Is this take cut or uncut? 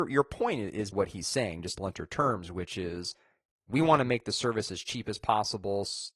cut